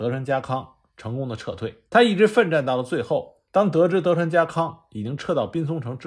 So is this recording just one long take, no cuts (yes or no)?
no